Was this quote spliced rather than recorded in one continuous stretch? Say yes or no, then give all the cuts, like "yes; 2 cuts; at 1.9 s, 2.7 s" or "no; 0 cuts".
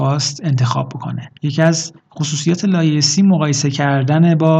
yes; 1 cut; at 1.4 s